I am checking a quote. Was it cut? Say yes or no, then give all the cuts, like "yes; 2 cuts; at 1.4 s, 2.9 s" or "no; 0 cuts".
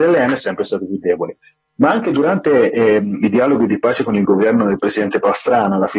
no; 0 cuts